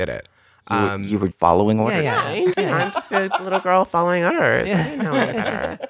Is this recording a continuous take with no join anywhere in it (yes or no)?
no